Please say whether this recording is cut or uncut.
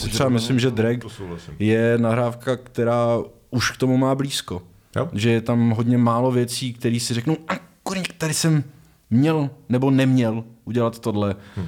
uncut